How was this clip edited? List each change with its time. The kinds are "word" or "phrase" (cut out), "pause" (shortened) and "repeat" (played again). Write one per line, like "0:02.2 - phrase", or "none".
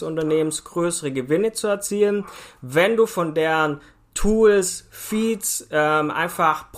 none

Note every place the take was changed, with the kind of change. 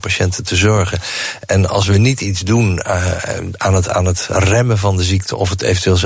none

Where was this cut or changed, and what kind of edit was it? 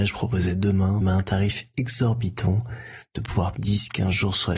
0:01.0 - word
0:03.5 - word

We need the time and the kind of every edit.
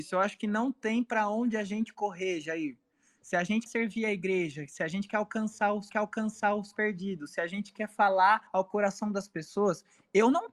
0:03.7 - word
0:05.9 - repeat
0:08.5 - pause

